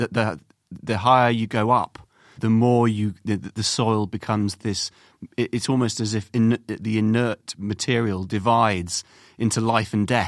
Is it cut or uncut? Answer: cut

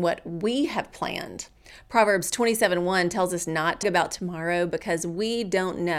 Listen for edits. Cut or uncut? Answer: cut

